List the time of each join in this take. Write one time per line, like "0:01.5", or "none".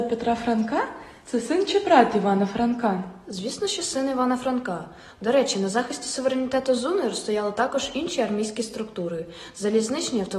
none